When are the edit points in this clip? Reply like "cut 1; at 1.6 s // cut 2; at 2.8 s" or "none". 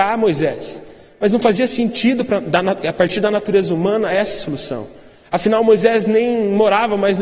none

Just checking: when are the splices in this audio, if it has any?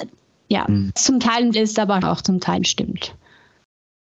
cut 1; at 1.0 s // cut 2; at 1.5 s // cut 3; at 2.0 s // cut 4; at 2.6 s

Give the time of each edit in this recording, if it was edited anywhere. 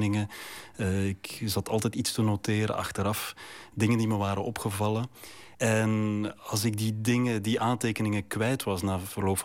cut 1; at 5.5 s

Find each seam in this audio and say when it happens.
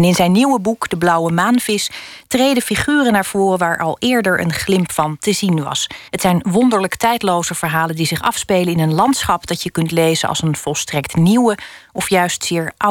cut 1; at 6.1 s

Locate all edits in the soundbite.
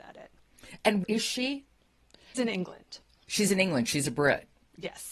cut 1; at 1.0 s // cut 2; at 2.3 s // cut 3; at 3.2 s

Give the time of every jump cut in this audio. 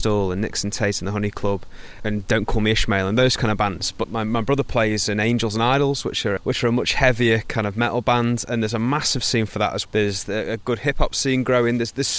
cut 1; at 2.0 s // cut 2; at 4.0 s // cut 3; at 6.4 s // cut 4; at 9.8 s

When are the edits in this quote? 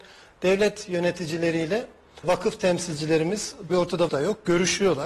cut 1; at 2.2 s // cut 2; at 3.7 s // cut 3; at 4.1 s

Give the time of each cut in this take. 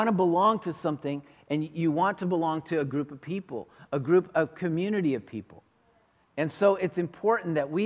none

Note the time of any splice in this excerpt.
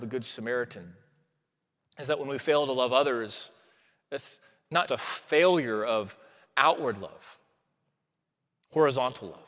cut 1; at 4.9 s

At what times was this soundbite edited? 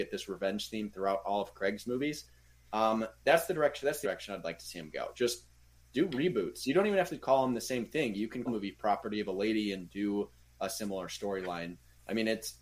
cut 1; at 4.0 s // cut 2; at 8.5 s

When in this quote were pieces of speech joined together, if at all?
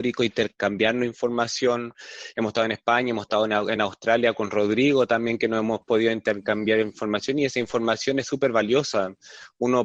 none

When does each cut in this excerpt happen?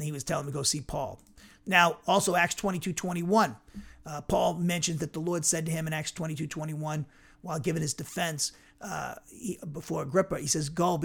none

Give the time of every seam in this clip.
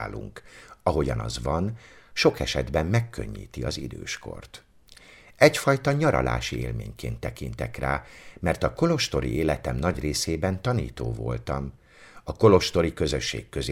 none

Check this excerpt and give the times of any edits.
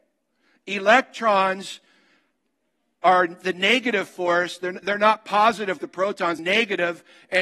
cut 1; at 4.8 s // cut 2; at 5.8 s // cut 3; at 6.4 s

